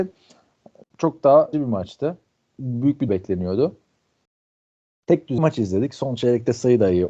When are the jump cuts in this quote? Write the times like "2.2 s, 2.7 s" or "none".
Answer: 0.9 s, 1.5 s, 3.1 s, 5.4 s